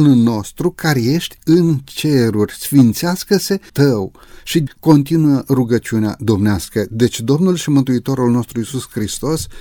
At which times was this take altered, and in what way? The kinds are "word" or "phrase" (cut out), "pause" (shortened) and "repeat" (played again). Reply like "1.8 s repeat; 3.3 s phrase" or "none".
3.7 s word; 4.7 s word

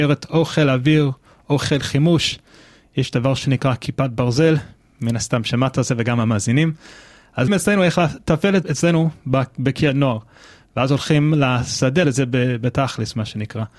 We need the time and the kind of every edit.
7.5 s word; 8.6 s word; 12.0 s word

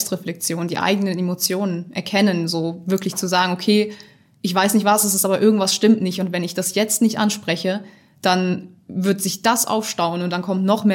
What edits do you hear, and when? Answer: none

